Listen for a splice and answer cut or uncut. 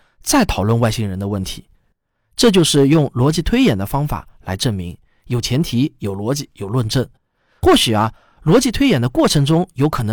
uncut